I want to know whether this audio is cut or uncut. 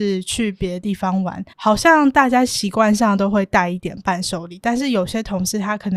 cut